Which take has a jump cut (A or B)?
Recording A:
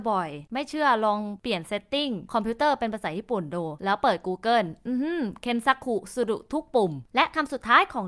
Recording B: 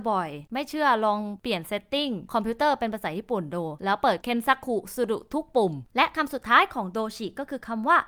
B